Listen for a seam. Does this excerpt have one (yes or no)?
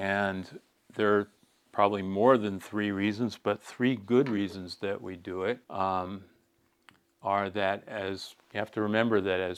yes